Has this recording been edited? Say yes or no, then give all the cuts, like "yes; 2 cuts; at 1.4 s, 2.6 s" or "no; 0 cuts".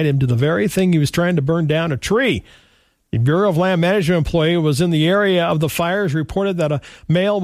no; 0 cuts